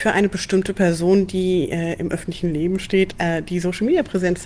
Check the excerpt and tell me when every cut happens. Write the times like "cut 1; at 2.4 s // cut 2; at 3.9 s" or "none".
none